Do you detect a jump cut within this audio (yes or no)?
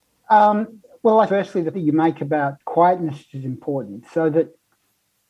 yes